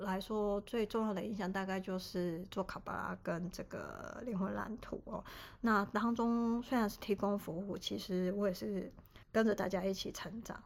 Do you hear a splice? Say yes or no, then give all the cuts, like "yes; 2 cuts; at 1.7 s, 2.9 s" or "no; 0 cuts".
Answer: yes; 1 cut; at 9.2 s